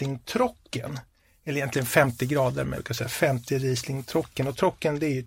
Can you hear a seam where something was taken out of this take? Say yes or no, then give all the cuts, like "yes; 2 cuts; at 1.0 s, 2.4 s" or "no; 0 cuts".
yes; 1 cut; at 2.7 s